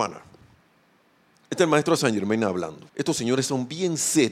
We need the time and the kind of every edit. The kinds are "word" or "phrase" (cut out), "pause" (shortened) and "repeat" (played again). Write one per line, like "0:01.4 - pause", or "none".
0:02.0 - word
0:02.9 - pause